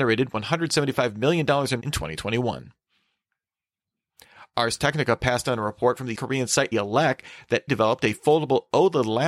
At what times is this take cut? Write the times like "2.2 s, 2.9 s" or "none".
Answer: 1.8 s, 6.1 s, 6.7 s, 7.7 s